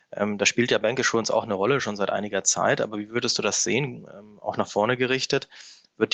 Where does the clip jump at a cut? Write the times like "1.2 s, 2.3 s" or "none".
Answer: none